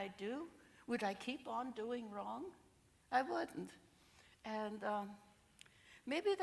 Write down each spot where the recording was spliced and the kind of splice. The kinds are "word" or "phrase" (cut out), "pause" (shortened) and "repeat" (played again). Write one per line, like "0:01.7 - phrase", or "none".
none